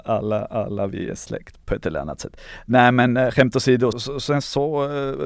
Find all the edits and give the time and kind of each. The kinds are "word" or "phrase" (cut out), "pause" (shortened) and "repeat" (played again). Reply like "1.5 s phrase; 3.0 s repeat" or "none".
1.6 s word; 3.9 s word